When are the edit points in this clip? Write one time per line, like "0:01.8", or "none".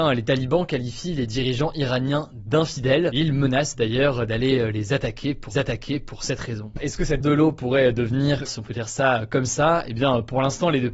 0:05.5
0:06.8
0:07.2
0:08.5